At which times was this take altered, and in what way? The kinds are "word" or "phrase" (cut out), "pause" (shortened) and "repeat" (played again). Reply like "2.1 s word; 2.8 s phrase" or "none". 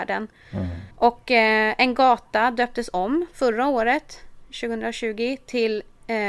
0.9 s pause